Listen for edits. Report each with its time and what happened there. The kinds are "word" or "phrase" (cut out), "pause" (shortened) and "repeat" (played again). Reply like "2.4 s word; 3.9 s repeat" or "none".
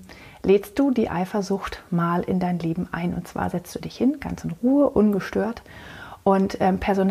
none